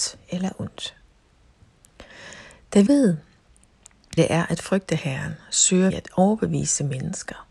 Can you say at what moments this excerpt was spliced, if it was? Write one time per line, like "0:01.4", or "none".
0:02.9
0:04.2
0:05.9